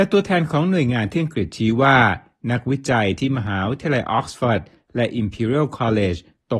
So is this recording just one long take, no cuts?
yes; 0 cuts

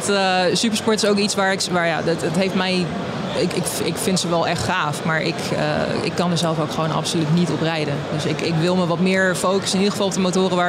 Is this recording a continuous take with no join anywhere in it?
yes; 0 cuts

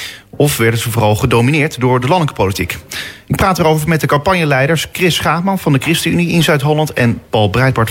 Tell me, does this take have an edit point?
no; 0 cuts

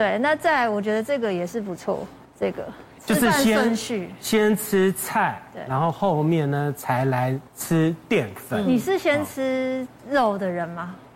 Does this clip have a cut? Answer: yes; 2 cuts; at 2.2 s, 7.5 s

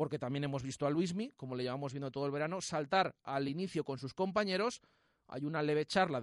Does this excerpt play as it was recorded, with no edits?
yes; 0 cuts

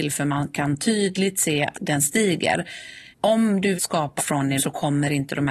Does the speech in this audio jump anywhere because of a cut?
yes; 5 cuts; at 1.7 s, 3.1 s, 3.7 s, 4.2 s, 4.6 s

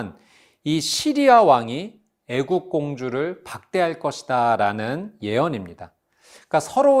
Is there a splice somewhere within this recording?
no; 0 cuts

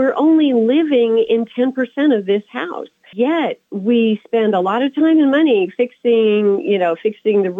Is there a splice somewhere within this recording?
yes; 1 cut; at 3.1 s

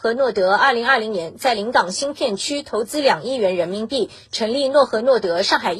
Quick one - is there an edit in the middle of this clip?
no; 0 cuts

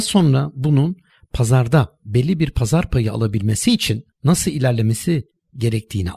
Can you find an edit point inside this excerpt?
no; 0 cuts

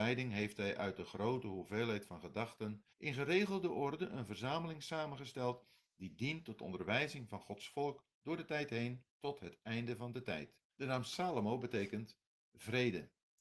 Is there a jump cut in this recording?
yes; 3 cuts; at 2.9 s, 9.1 s, 10.7 s

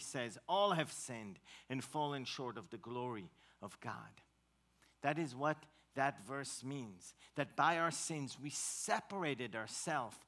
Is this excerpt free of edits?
yes; 0 cuts

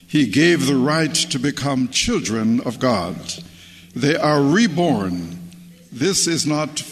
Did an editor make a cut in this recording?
no; 0 cuts

